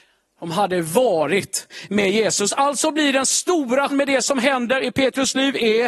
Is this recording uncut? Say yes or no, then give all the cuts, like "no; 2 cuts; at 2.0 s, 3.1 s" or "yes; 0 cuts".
no; 1 cut; at 3.9 s